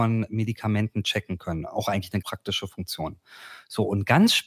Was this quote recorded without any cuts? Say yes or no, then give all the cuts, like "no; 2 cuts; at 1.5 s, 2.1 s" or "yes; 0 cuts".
no; 1 cut; at 2.2 s